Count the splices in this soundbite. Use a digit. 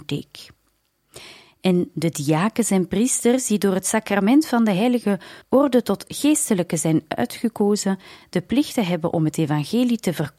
1